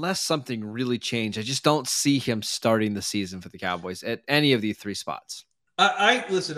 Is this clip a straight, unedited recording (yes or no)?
yes